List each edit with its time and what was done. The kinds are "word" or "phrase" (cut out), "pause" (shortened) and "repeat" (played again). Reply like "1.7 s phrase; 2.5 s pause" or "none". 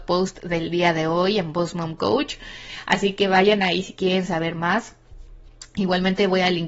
none